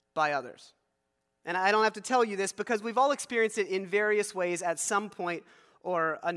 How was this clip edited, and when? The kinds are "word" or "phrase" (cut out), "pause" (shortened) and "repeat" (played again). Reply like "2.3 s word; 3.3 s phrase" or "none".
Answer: none